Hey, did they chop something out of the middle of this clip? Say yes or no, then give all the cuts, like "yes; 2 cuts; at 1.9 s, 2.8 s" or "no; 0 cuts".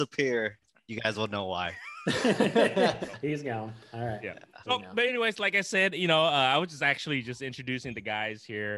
no; 0 cuts